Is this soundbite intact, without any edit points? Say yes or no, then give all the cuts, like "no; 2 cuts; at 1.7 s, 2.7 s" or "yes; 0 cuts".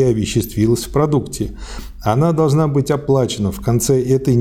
yes; 0 cuts